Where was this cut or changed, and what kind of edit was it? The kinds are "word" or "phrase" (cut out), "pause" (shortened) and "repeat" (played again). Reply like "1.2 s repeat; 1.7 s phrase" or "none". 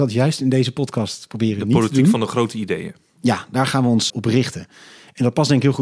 4.1 s word